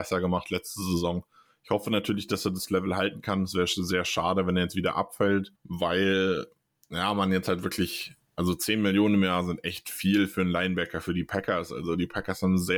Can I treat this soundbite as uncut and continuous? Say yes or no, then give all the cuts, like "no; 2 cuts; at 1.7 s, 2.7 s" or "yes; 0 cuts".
no; 1 cut; at 5.6 s